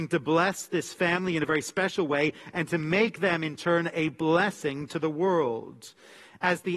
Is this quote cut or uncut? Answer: uncut